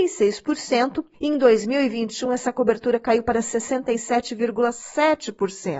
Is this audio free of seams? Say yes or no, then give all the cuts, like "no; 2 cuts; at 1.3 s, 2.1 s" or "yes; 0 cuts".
yes; 0 cuts